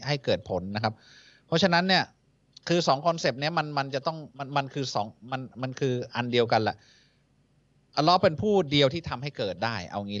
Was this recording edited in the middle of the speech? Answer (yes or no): yes